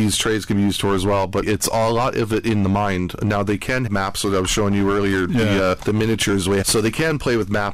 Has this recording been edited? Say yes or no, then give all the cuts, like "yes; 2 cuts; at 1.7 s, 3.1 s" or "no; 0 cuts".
yes; 4 cuts; at 1.4 s, 3.9 s, 5.8 s, 6.6 s